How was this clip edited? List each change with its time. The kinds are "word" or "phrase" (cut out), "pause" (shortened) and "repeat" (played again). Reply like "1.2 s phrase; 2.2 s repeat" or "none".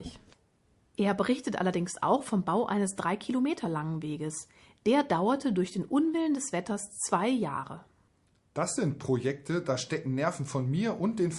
none